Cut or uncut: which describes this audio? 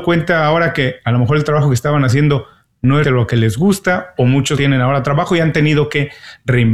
cut